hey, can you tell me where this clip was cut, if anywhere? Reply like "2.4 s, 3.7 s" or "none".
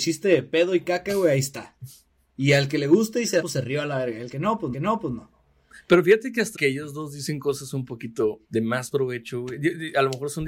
3.4 s, 4.7 s, 6.5 s, 8.4 s